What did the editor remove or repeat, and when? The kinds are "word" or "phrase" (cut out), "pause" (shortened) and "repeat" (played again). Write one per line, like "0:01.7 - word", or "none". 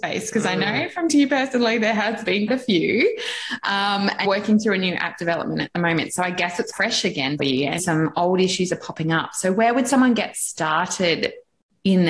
0:01.1 - word
0:02.5 - word
0:04.2 - word
0:06.7 - word
0:07.4 - word
0:07.8 - word